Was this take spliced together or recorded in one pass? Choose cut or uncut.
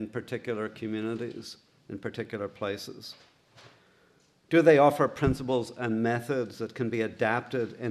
uncut